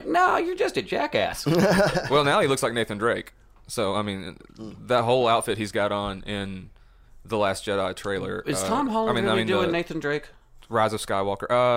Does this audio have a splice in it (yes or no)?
no